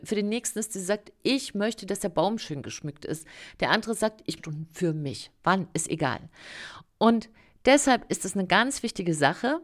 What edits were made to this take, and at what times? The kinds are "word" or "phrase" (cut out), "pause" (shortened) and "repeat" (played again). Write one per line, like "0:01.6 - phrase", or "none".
0:04.4 - phrase